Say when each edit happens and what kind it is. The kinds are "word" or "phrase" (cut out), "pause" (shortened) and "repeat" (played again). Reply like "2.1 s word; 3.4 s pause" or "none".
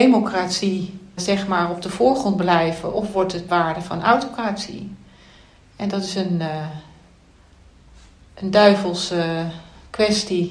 1.2 s word; 3.5 s word